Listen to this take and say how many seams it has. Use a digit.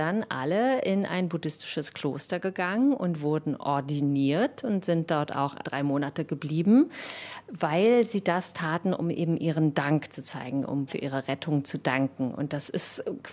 1